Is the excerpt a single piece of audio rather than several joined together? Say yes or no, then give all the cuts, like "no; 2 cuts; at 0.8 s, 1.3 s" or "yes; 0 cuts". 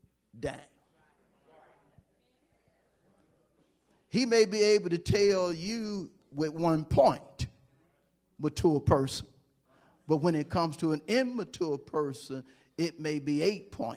yes; 0 cuts